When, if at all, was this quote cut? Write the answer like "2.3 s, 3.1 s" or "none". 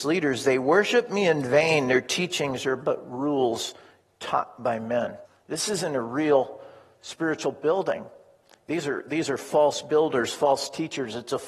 5.2 s